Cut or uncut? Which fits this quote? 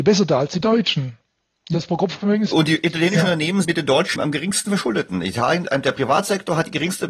cut